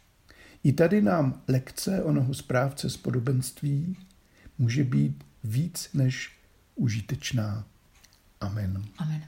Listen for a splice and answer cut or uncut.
uncut